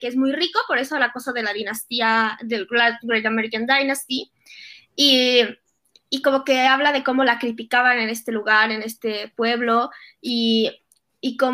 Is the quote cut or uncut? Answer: uncut